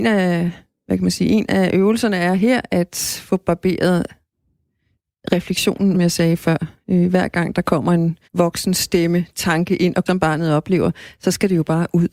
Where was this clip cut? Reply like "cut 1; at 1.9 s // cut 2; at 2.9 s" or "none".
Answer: cut 1; at 5.9 s // cut 2; at 8.2 s // cut 3; at 10.1 s